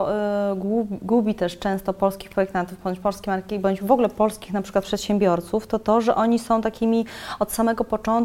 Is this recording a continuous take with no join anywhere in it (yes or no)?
yes